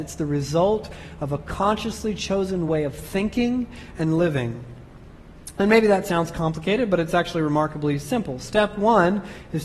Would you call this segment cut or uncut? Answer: uncut